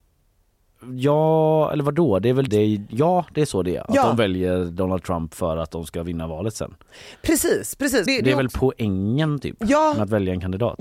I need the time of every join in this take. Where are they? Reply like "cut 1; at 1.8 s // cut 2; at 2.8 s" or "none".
cut 1; at 2.5 s // cut 2; at 8.1 s

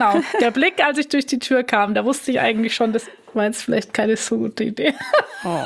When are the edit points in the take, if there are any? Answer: none

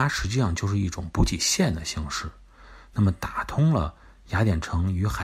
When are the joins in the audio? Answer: none

